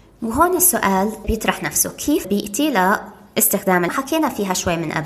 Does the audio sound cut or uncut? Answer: cut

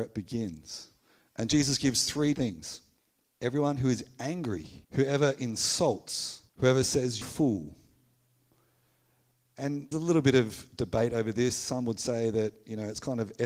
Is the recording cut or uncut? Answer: cut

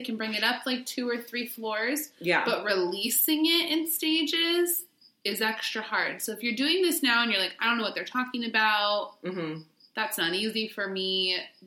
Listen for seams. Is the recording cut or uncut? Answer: uncut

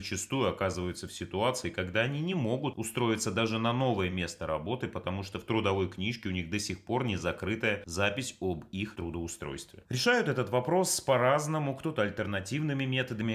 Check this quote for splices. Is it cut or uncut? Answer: uncut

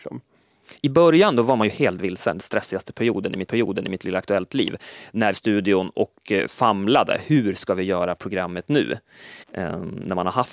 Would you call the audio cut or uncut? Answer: cut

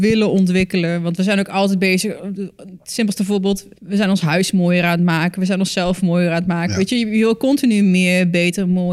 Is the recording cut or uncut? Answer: cut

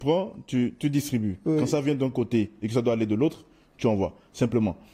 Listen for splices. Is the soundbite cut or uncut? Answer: uncut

